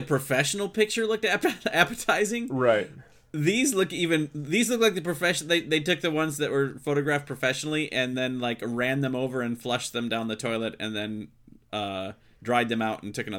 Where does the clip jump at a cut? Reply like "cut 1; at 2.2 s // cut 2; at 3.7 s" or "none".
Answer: none